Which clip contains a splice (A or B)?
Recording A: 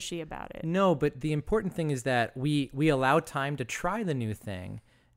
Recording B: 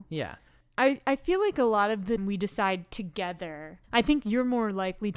B